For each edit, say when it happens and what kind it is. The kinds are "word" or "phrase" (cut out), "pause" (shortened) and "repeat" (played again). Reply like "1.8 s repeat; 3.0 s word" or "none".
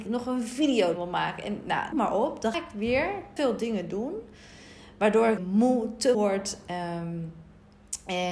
0.9 s word; 1.9 s word; 2.5 s word; 3.4 s word; 5.4 s word; 6.1 s word